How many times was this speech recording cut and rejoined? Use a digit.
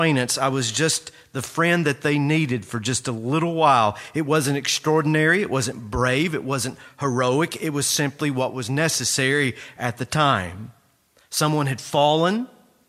0